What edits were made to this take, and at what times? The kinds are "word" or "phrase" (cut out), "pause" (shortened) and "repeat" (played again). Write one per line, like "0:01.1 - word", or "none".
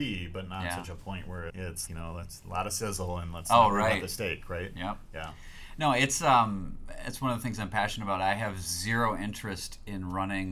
0:01.5 - word
0:01.9 - word